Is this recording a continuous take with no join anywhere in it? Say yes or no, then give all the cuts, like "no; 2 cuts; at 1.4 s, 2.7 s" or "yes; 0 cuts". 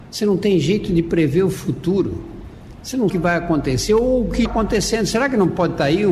no; 2 cuts; at 3.1 s, 4.5 s